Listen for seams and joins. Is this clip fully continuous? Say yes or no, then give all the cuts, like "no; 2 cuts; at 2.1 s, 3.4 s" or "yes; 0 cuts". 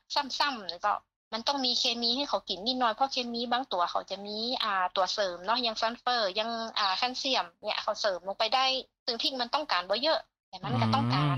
yes; 0 cuts